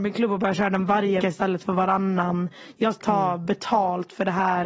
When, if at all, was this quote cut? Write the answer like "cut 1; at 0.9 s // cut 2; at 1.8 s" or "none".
cut 1; at 1.2 s // cut 2; at 3.0 s